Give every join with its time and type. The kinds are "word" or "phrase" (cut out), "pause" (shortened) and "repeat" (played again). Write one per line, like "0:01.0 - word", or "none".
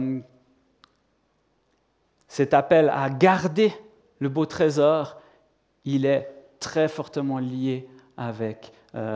none